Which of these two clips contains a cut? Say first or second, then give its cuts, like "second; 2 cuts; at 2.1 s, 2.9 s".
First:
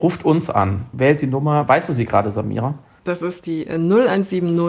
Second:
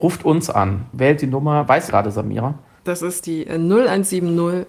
second; 1 cut; at 1.9 s